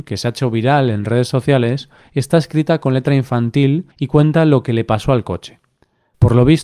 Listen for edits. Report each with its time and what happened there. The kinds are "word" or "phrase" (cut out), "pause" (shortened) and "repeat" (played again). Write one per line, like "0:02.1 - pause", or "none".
0:03.9 - pause